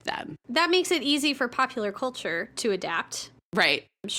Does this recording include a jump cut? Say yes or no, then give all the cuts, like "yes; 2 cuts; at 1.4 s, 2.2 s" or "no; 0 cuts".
no; 0 cuts